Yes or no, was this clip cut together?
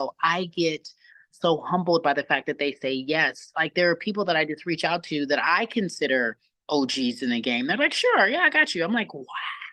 no